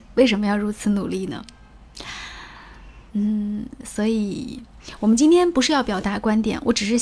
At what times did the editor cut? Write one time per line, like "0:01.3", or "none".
0:03.1